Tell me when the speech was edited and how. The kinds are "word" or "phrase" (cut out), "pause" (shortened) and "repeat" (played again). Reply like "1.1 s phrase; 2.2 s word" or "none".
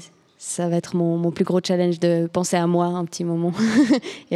none